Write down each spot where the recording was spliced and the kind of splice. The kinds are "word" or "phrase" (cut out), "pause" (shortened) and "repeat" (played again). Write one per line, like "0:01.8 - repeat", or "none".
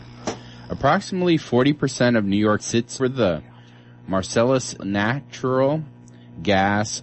0:02.6 - word
0:03.0 - word
0:04.8 - word

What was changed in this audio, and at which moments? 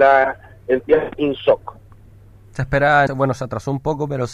0:01.1 - word
0:03.1 - word

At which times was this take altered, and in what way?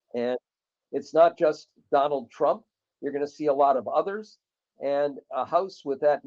none

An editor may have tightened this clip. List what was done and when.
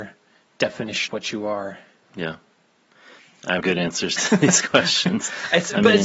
0:01.1 - word
0:03.2 - pause
0:03.6 - word

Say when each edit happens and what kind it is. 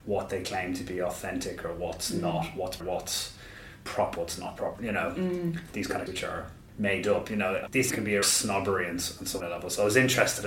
0:02.8 - word
0:04.1 - word
0:04.7 - word
0:06.1 - word
0:07.9 - word
0:08.2 - word
0:09.4 - word

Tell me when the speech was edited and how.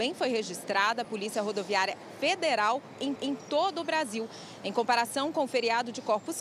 0:01.0 - word
0:03.2 - repeat

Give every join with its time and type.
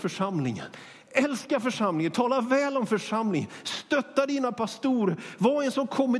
none

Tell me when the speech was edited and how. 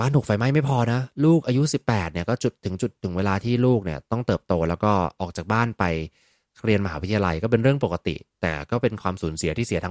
none

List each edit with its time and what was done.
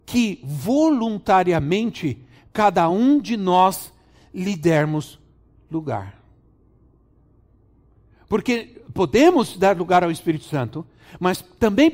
none

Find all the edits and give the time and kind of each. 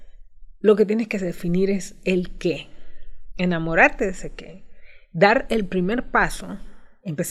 none

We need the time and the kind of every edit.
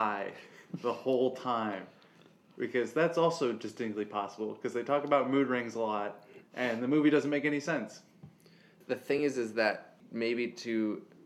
none

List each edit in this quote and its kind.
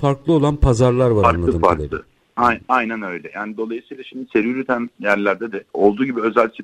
0:05.7 - pause

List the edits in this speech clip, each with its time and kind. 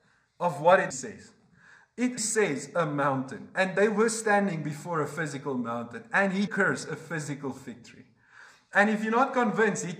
0:00.9 - word
0:02.2 - word
0:06.5 - word

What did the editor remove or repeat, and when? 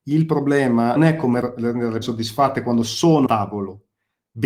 0:01.0 - word
0:01.4 - word
0:02.0 - word
0:03.3 - word

